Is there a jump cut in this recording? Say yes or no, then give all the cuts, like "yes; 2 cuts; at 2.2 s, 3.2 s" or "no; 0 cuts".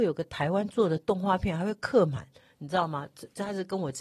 no; 0 cuts